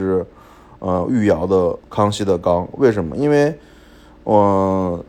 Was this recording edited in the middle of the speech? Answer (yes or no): yes